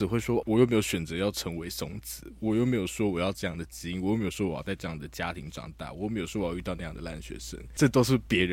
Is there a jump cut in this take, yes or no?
no